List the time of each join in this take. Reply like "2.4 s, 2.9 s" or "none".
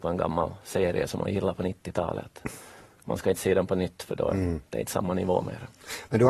none